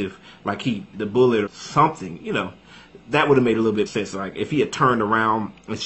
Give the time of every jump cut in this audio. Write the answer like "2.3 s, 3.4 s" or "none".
0.9 s, 1.5 s, 3.9 s